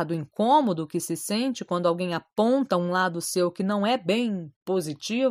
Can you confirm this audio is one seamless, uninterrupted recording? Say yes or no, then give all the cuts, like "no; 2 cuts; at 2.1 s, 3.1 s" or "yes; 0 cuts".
yes; 0 cuts